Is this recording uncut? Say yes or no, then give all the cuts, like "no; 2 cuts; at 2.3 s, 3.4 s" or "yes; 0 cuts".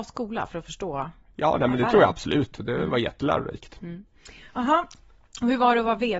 yes; 0 cuts